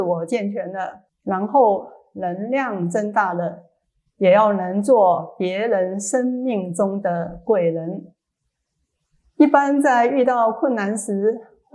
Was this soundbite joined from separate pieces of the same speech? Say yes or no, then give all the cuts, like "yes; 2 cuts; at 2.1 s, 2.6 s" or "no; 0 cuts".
yes; 1 cut; at 1.1 s